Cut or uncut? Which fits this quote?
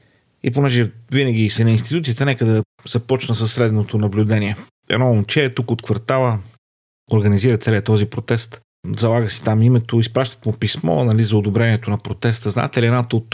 cut